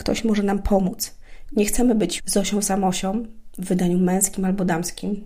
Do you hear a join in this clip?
yes; 1 cut; at 2.2 s

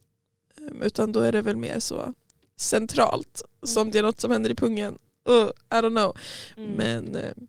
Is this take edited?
no; 0 cuts

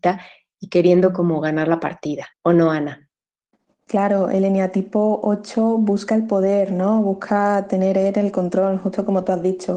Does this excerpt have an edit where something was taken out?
yes; 1 cut; at 2.3 s

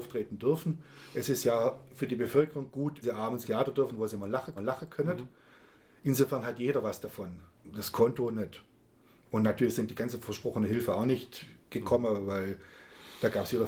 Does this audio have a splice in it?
yes; 4 cuts; at 3.0 s, 3.4 s, 4.6 s, 7.5 s

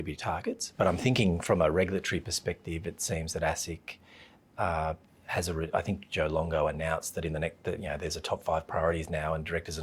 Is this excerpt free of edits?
yes; 0 cuts

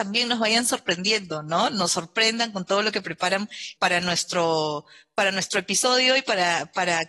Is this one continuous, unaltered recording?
no; 1 cut; at 3.8 s

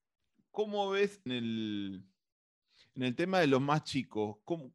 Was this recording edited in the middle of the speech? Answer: yes; 1 cut; at 1.3 s

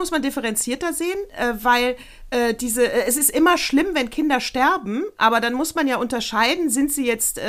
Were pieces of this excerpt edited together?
no; 0 cuts

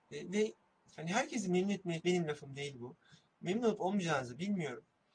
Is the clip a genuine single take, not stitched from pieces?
no; 1 cut; at 2.0 s

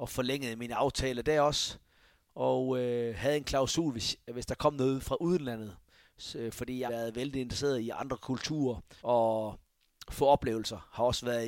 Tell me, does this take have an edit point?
yes; 2 cuts; at 6.9 s, 9.0 s

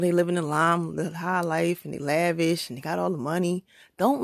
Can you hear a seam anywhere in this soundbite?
no; 0 cuts

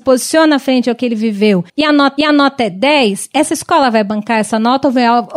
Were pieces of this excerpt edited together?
yes; 2 cuts; at 1.7 s, 2.2 s

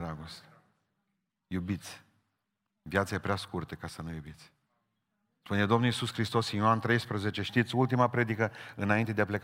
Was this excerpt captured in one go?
yes; 0 cuts

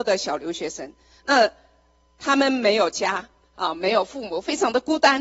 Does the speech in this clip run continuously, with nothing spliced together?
yes; 0 cuts

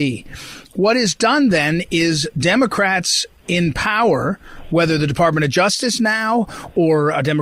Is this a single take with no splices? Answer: yes; 0 cuts

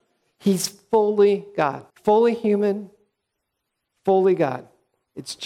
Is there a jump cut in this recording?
yes; 1 cut; at 1.9 s

